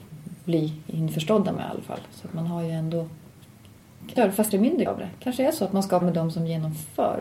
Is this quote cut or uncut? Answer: cut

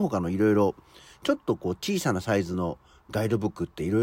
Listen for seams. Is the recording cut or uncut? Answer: uncut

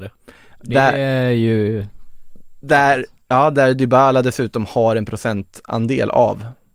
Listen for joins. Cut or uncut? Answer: uncut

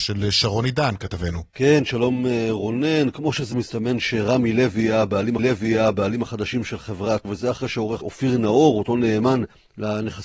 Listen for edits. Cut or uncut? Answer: cut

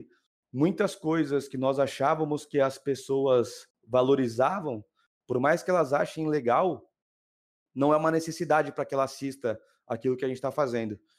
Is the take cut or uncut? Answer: uncut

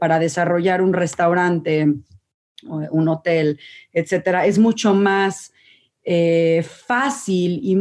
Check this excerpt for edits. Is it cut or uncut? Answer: uncut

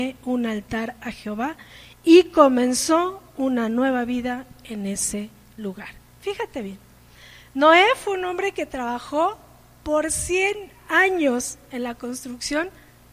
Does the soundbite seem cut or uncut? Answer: uncut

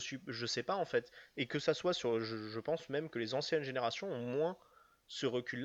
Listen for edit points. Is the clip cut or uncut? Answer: uncut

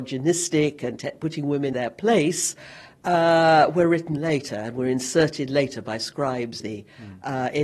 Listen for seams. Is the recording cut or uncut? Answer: cut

